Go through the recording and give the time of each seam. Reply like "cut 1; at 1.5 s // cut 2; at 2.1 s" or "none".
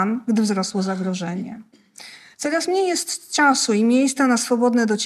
none

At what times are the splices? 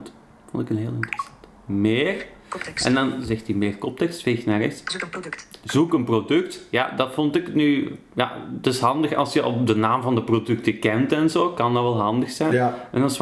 none

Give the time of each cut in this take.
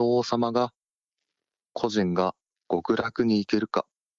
cut 1; at 2.6 s

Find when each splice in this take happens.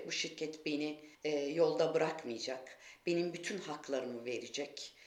cut 1; at 1.1 s

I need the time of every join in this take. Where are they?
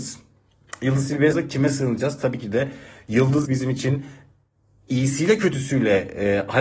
cut 1; at 1.3 s // cut 2; at 3.4 s

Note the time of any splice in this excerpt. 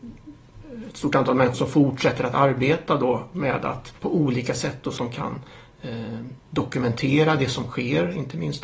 cut 1; at 1.5 s // cut 2; at 4.0 s // cut 3; at 5.0 s // cut 4; at 6.4 s

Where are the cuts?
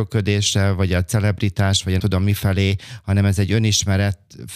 cut 1; at 2.0 s

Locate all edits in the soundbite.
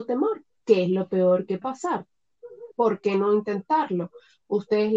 cut 1; at 1.6 s // cut 2; at 2.7 s

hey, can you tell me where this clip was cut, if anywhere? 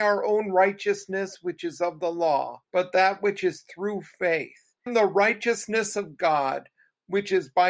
cut 1; at 2.6 s // cut 2; at 4.9 s

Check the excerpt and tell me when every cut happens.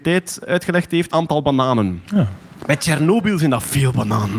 cut 1; at 1.1 s

